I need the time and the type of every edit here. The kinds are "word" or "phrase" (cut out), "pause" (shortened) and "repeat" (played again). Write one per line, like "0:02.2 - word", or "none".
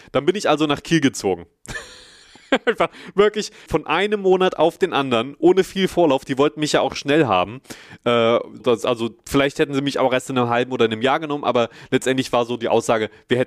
0:03.7 - word
0:08.6 - word